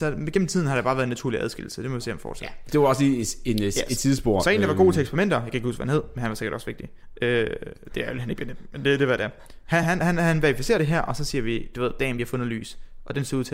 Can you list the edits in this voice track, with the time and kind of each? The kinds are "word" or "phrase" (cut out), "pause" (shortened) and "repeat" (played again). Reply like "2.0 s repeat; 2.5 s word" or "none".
none